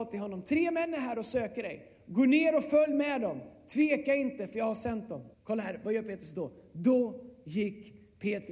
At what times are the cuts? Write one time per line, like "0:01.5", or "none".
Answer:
0:05.3